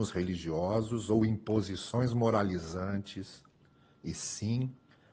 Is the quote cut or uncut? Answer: uncut